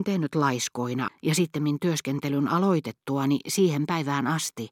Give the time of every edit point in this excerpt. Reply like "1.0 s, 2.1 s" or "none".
1.1 s